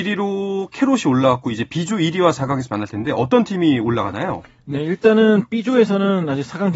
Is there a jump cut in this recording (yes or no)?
no